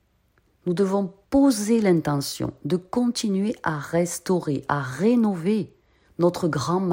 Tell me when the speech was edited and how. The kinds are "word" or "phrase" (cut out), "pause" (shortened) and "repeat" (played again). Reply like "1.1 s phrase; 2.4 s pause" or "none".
1.2 s pause